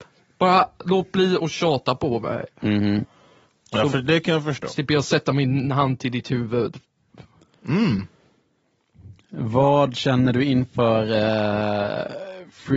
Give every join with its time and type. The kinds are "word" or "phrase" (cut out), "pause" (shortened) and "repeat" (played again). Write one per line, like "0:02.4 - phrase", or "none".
none